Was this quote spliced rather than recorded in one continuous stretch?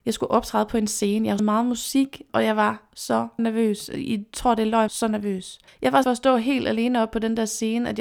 yes; 5 cuts; at 1.4 s, 3.4 s, 4.9 s, 5.7 s, 6.0 s

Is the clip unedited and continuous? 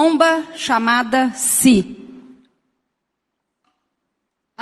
yes; 0 cuts

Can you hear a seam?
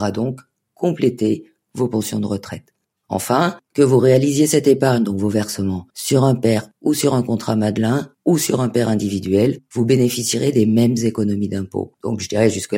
yes; 1 cut; at 5.9 s

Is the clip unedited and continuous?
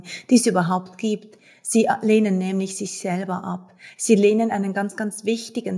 yes; 0 cuts

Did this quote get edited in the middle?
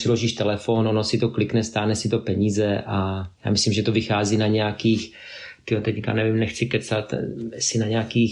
no; 0 cuts

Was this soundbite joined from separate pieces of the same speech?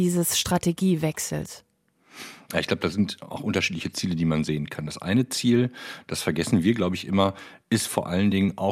no; 0 cuts

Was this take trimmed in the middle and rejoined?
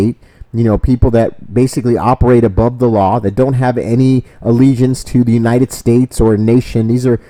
no; 0 cuts

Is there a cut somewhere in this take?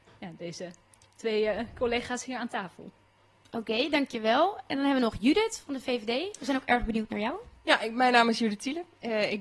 no; 0 cuts

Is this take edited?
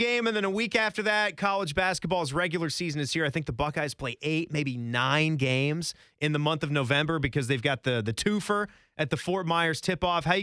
no; 0 cuts

